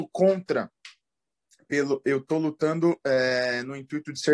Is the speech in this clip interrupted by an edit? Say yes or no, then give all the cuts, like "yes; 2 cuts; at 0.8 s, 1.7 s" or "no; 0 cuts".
no; 0 cuts